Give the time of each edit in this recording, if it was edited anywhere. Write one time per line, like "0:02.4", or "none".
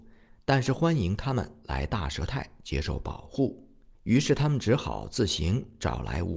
0:03.9